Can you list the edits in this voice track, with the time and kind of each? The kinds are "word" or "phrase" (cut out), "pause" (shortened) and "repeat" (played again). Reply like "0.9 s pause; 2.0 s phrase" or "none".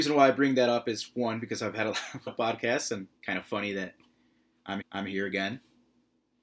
2.3 s word; 3.2 s pause; 4.8 s repeat